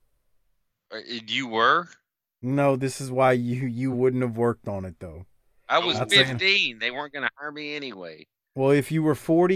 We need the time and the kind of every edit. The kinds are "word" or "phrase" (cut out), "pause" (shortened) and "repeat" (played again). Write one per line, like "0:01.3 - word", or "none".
none